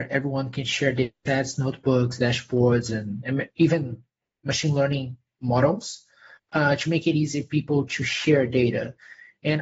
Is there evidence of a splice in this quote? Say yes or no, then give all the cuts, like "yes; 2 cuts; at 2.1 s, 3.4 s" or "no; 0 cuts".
no; 0 cuts